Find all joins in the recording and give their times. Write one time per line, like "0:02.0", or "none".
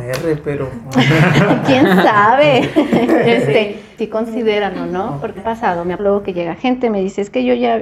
0:04.0
0:05.4
0:06.0